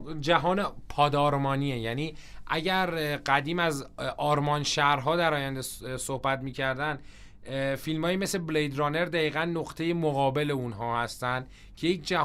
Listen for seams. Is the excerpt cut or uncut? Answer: uncut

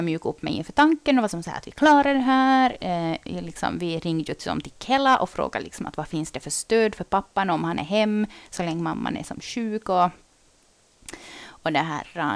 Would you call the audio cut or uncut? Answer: uncut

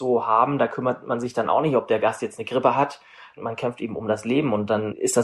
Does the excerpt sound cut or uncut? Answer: uncut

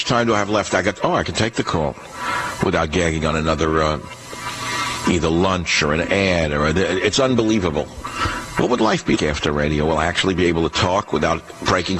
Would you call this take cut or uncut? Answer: cut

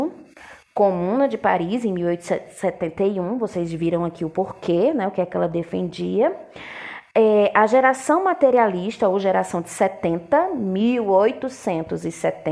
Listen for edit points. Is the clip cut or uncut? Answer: uncut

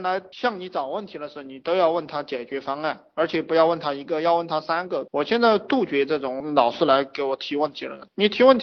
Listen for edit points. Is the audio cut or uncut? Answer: uncut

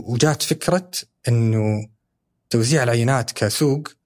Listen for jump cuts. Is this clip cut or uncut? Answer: uncut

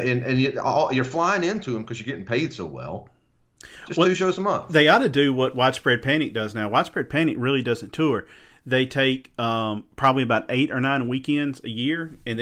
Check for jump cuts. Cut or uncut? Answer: uncut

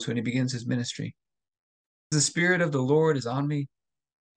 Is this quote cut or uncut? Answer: cut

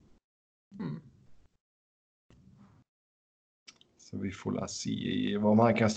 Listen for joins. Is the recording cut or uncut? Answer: uncut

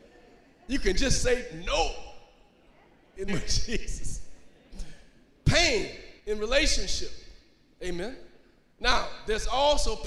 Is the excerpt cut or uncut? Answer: cut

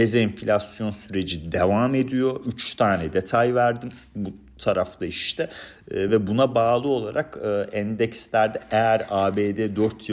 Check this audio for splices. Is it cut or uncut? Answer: uncut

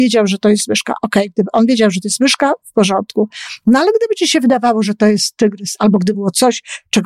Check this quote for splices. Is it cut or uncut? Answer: cut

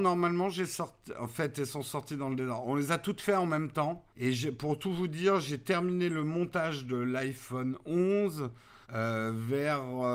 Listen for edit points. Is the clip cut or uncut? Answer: cut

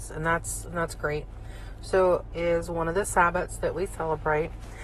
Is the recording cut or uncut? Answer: cut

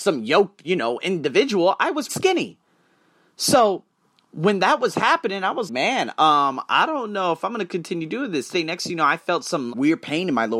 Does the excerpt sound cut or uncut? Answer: cut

